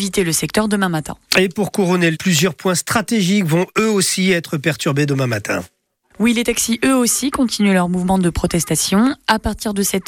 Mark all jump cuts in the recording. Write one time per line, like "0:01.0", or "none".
0:02.1